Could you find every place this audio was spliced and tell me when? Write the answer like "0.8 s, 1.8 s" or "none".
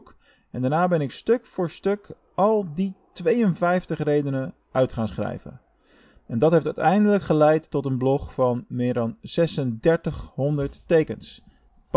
none